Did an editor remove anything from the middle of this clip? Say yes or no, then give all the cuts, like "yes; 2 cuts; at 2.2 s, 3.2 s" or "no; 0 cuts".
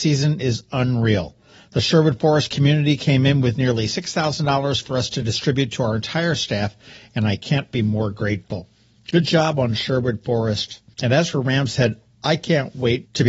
no; 0 cuts